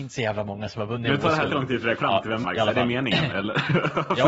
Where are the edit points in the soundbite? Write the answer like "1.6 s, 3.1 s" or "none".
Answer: 1.5 s, 2.0 s, 2.4 s